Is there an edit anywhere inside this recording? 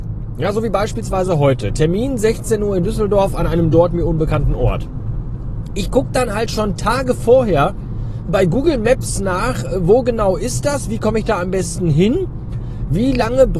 yes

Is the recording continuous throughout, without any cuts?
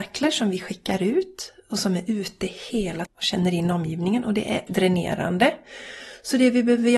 no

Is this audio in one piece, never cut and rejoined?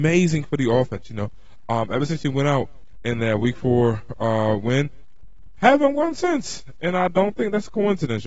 yes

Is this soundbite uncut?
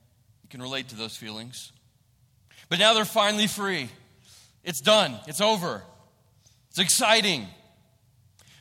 yes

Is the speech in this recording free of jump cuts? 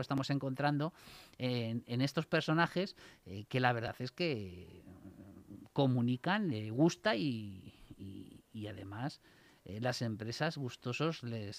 yes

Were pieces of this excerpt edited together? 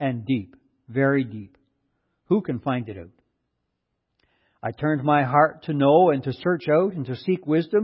no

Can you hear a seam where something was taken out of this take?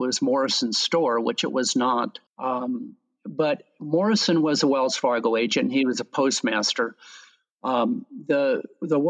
yes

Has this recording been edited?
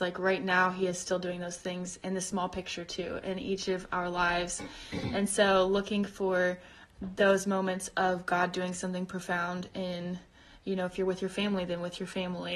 no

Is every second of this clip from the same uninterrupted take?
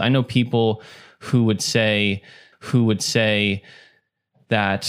no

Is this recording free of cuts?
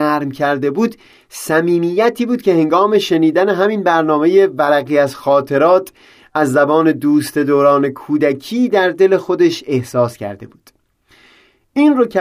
yes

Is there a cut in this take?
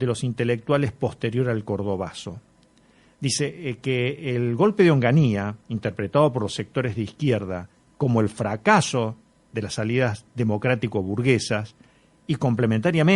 yes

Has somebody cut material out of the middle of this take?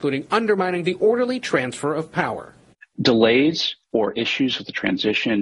yes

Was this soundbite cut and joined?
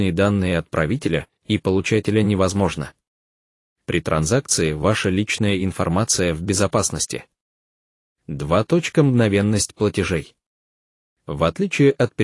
no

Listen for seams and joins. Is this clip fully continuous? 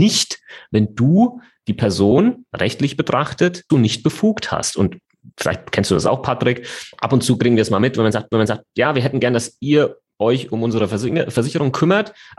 no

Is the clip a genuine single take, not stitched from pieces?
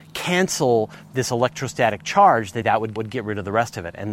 no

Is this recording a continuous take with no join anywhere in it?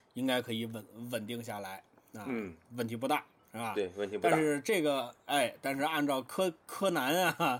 yes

